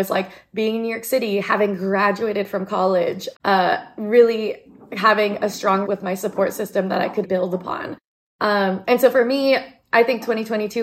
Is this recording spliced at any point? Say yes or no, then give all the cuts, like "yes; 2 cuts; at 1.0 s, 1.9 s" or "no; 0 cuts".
yes; 3 cuts; at 3.3 s, 5.8 s, 7.2 s